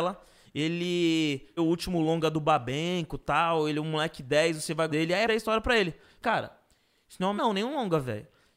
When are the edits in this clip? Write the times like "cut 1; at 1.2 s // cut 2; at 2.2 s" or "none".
cut 1; at 1.6 s // cut 2; at 4.9 s // cut 3; at 5.3 s // cut 4; at 6.2 s // cut 5; at 7.4 s